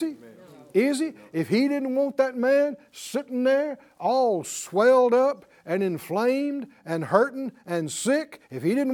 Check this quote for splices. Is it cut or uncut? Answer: uncut